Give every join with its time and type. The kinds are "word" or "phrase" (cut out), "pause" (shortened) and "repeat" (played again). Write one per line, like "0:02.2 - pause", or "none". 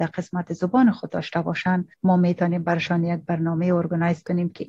0:01.9 - pause